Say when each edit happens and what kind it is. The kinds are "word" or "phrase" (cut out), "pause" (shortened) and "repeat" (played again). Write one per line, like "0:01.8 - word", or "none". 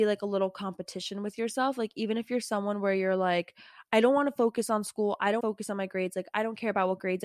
0:05.4 - phrase

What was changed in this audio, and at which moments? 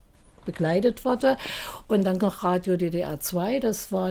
0:02.2 - phrase

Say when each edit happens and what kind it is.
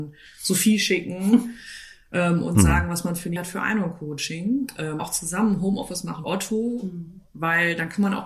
0:03.4 - word
0:05.0 - word
0:06.2 - word

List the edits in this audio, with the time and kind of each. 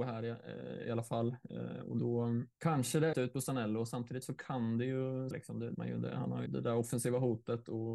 0:02.5 - pause
0:03.1 - phrase
0:04.2 - word
0:05.3 - phrase
0:05.7 - word
0:06.5 - word

